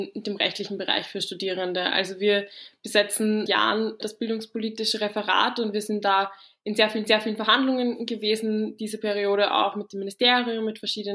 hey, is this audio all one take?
no; 2 cuts; at 3.5 s, 7.1 s

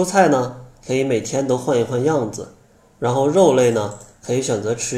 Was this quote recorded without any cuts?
yes; 0 cuts

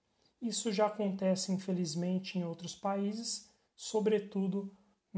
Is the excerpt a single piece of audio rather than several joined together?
yes; 0 cuts

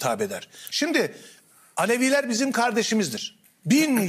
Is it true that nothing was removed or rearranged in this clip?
yes; 0 cuts

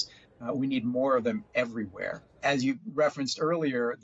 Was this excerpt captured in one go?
yes; 0 cuts

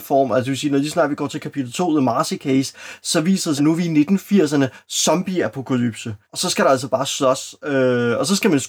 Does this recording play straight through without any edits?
no; 2 cuts; at 3.6 s, 6.2 s

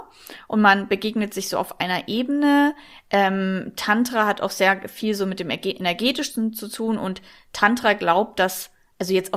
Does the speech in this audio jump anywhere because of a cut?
no; 0 cuts

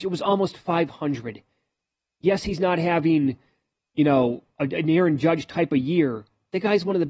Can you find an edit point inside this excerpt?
no; 0 cuts

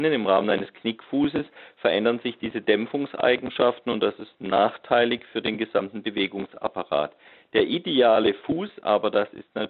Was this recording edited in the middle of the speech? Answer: no; 0 cuts

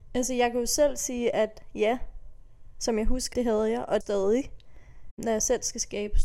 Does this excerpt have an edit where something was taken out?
yes; 2 cuts; at 3.3 s, 4.0 s

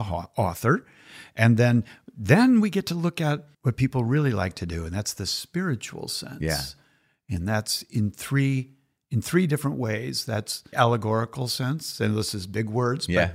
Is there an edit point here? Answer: yes; 2 cuts; at 3.5 s, 10.7 s

